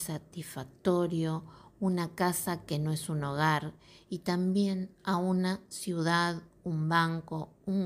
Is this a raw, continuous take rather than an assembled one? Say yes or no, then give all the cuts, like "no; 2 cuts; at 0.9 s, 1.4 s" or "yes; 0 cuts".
yes; 0 cuts